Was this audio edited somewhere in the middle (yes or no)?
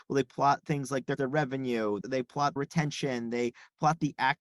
yes